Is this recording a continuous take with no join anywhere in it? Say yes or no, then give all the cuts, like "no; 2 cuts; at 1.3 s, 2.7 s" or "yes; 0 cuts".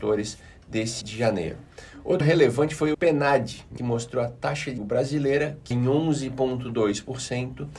no; 6 cuts; at 1.0 s, 2.2 s, 2.9 s, 3.8 s, 4.8 s, 5.7 s